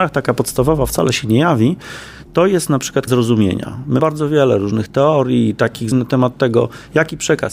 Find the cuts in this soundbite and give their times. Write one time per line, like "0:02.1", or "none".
0:03.1
0:04.0
0:05.9